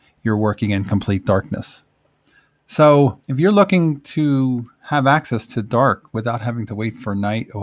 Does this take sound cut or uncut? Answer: cut